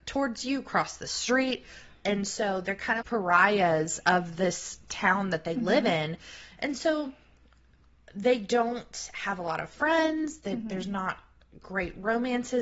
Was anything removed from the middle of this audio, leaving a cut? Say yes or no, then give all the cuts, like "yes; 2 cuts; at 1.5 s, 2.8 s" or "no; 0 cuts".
yes; 1 cut; at 3.0 s